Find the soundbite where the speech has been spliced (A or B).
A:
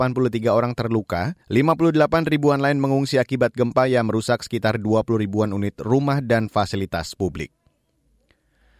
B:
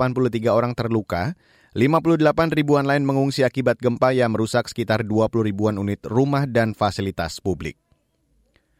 A